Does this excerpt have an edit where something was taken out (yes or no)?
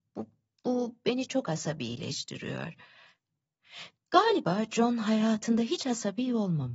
yes